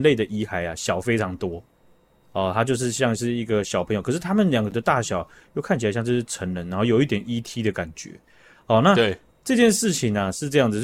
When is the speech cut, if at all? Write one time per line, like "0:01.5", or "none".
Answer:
none